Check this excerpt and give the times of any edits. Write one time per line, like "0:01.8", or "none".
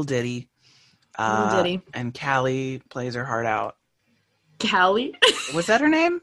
none